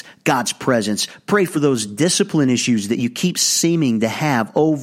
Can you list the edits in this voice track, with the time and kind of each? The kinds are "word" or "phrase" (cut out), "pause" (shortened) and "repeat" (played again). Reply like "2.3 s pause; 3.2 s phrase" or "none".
none